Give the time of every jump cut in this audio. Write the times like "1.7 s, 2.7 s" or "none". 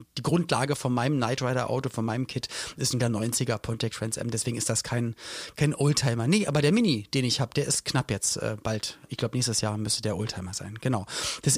3.0 s